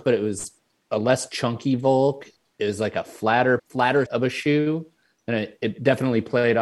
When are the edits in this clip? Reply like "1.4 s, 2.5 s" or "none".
3.6 s, 4.1 s